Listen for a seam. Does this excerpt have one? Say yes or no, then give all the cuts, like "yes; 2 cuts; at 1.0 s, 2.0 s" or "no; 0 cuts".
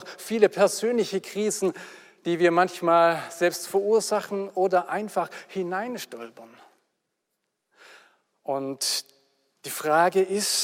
no; 0 cuts